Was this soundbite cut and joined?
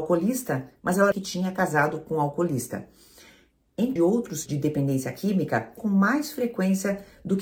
yes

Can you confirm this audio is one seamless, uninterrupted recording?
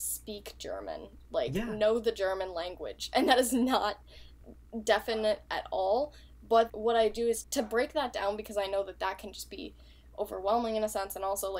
no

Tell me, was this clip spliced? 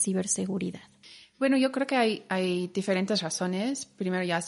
no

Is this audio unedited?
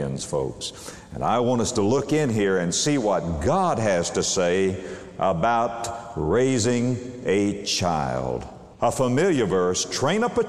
no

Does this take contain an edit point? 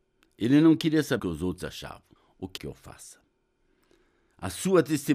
yes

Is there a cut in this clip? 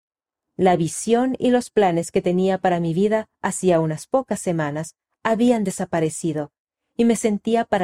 no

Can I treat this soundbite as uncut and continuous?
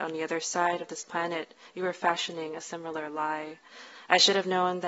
yes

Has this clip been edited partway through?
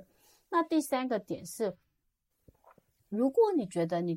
no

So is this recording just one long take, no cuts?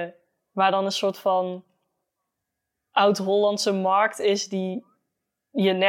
yes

